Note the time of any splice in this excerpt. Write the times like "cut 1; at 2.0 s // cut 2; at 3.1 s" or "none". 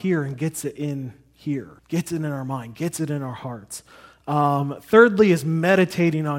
cut 1; at 1.8 s